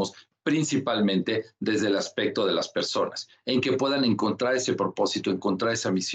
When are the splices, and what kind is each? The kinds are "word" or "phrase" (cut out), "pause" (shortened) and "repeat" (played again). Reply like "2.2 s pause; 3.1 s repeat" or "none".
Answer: none